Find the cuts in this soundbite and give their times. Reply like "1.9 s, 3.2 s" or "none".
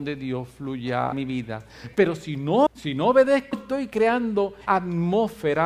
1.1 s, 2.7 s, 3.5 s, 4.7 s